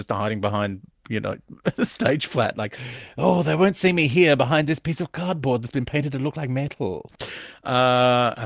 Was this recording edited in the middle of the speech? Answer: no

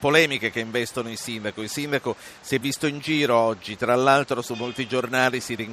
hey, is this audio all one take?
yes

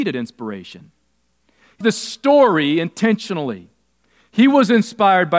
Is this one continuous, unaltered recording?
no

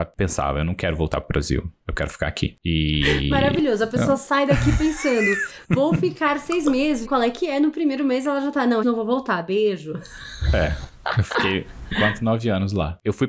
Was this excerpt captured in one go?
no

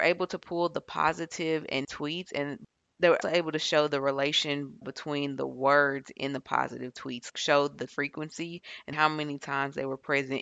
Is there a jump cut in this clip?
yes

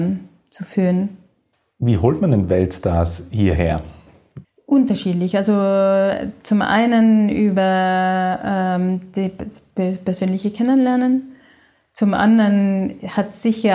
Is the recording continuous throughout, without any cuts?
yes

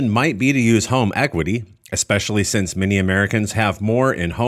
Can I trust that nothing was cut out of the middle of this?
yes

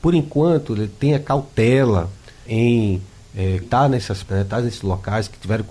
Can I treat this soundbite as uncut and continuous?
no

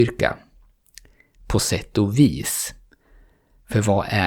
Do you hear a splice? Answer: no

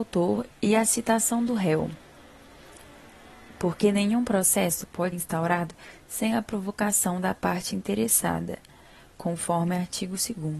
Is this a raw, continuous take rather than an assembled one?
no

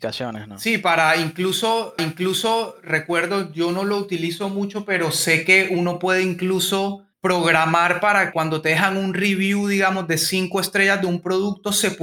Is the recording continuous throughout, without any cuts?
no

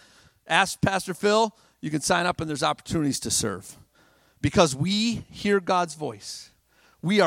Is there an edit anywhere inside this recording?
no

